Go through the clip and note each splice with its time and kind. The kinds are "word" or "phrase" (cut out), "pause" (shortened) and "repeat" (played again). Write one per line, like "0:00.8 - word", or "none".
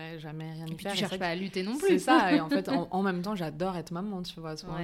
none